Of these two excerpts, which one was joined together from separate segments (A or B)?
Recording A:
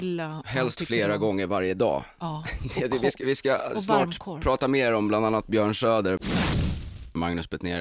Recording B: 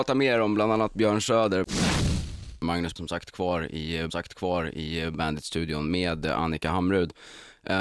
B